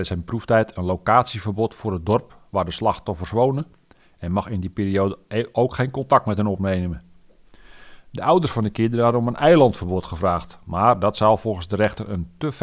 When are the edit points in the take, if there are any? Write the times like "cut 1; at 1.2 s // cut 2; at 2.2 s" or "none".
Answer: none